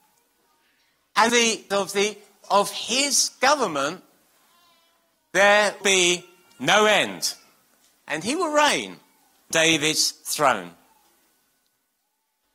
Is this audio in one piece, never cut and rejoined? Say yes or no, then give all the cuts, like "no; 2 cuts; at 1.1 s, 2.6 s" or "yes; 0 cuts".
no; 5 cuts; at 1.3 s, 1.7 s, 2.4 s, 5.8 s, 9.5 s